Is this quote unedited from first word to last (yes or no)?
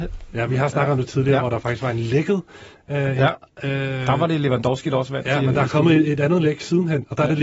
yes